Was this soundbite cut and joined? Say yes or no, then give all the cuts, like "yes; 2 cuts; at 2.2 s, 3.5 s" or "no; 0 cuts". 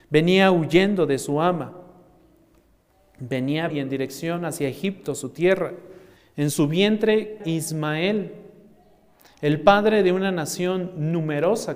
yes; 3 cuts; at 3.7 s, 6.2 s, 7.4 s